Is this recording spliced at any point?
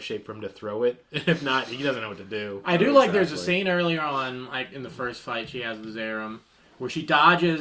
no; 0 cuts

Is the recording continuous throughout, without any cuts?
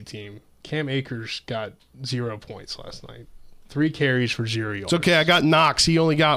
yes; 0 cuts

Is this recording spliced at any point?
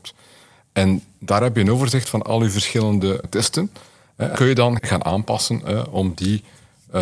yes; 3 cuts; at 3.2 s, 4.3 s, 4.8 s

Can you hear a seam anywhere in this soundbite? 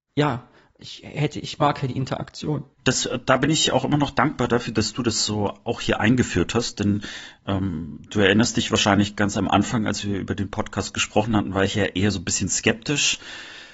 yes; 1 cut; at 2.7 s

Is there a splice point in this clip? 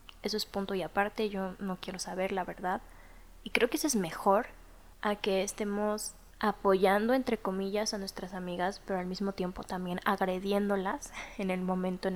yes; 2 cuts; at 4.9 s, 6.3 s

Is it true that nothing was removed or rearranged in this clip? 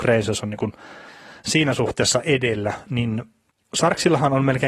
yes; 0 cuts

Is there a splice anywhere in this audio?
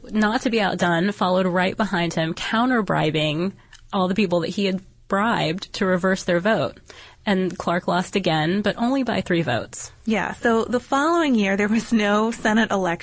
no; 0 cuts

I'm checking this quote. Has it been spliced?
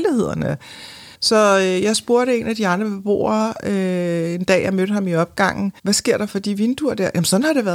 yes; 2 cuts; at 1.1 s, 5.8 s

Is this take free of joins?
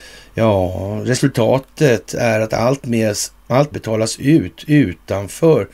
no; 1 cut; at 3.7 s

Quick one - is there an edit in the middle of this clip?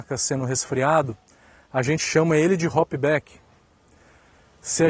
no; 0 cuts

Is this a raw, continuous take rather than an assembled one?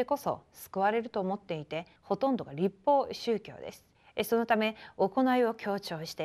no; 2 cuts; at 2.0 s, 3.9 s

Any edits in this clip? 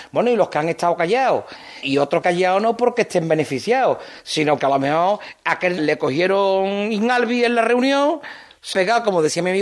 yes; 5 cuts; at 1.8 s, 2.2 s, 4.6 s, 5.8 s, 8.7 s

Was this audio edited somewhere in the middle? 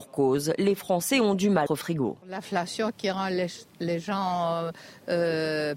yes; 2 cuts; at 1.7 s, 2.2 s

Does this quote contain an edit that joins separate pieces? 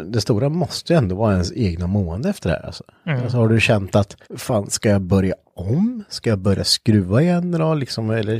yes; 1 cut; at 4.2 s

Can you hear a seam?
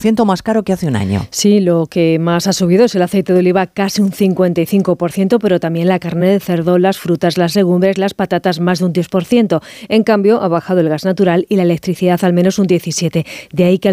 no; 0 cuts

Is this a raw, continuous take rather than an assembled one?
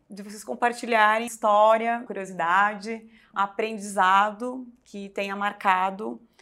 no; 3 cuts; at 1.3 s, 2.1 s, 3.3 s

